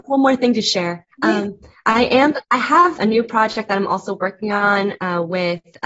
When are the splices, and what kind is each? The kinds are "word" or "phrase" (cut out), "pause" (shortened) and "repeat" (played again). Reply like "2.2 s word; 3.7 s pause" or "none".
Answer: 1.1 s pause; 2.4 s pause; 3.0 s word